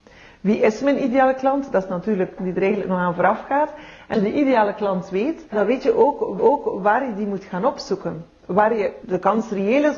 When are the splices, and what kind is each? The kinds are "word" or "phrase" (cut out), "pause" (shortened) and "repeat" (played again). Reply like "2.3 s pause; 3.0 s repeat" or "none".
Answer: 2.4 s phrase; 4.1 s word; 5.5 s word; 6.4 s repeat; 9.0 s word